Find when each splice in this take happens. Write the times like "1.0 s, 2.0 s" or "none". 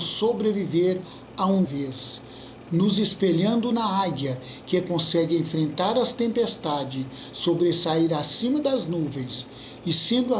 1.6 s